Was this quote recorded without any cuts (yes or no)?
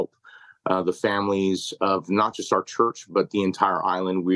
yes